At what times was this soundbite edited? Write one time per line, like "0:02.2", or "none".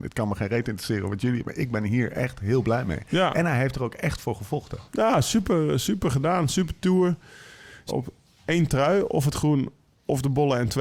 0:04.9
0:07.9

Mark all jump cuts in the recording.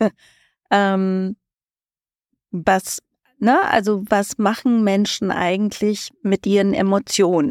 none

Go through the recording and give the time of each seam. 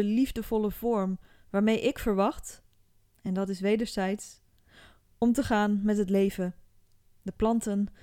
none

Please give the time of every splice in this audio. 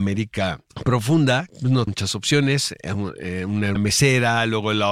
0:01.5
0:01.9
0:03.8

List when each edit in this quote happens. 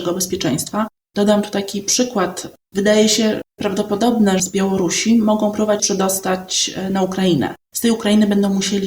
0:04.4
0:05.8

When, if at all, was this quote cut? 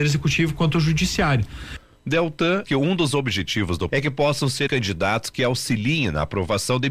0:02.6
0:03.9
0:04.7

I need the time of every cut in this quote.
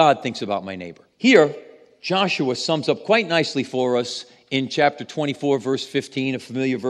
0:01.1

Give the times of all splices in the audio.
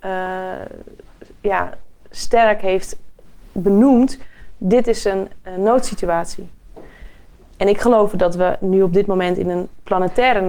none

